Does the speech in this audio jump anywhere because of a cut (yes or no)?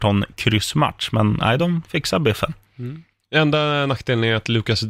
no